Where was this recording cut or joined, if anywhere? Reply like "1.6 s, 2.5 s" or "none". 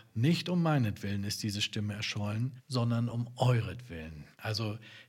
none